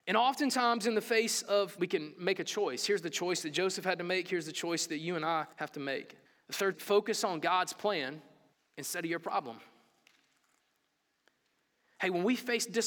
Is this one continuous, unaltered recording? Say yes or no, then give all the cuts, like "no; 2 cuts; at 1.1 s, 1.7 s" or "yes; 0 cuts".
no; 5 cuts; at 1.8 s, 5.5 s, 6.3 s, 6.7 s, 8.5 s